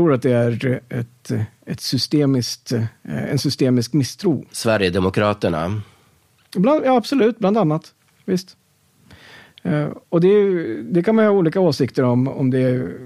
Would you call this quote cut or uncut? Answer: cut